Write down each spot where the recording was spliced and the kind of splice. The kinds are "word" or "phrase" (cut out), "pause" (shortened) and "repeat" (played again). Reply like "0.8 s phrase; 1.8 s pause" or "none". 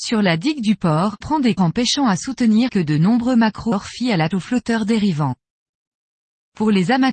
1.2 s word; 1.6 s word; 2.7 s word; 3.7 s word; 4.3 s word

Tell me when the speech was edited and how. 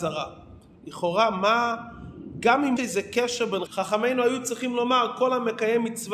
2.8 s word; 3.7 s phrase

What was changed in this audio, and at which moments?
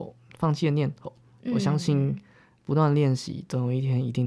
none

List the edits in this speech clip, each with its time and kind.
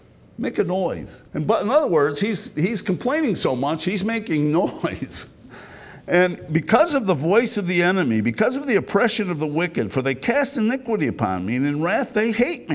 1.3 s pause

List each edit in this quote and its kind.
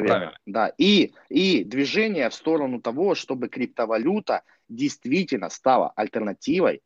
none

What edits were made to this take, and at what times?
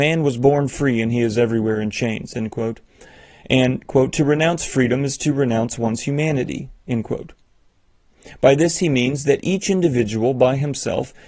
none

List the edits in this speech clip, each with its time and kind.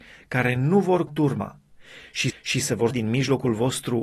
1.1 s word; 2.3 s repeat; 2.9 s word

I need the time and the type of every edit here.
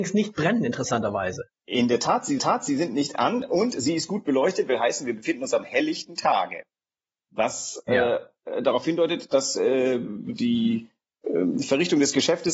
2.4 s repeat

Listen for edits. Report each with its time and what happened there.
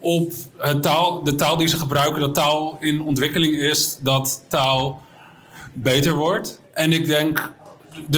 6.6 s pause

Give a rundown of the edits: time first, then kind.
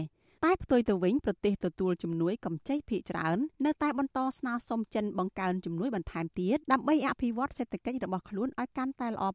3.5 s pause; 6.6 s pause

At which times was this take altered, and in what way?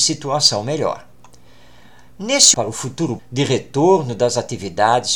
2.5 s word; 3.2 s word

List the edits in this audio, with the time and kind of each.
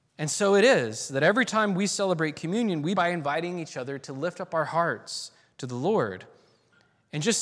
2.9 s word; 5.4 s pause

